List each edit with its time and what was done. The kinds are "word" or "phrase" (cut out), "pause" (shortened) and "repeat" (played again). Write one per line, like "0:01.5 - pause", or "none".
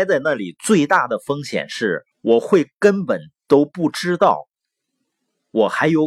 0:02.1 - pause